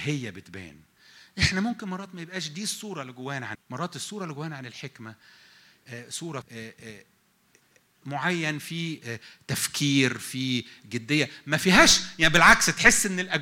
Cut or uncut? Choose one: cut